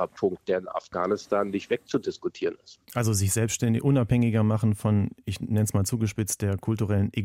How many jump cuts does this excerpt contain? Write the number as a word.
one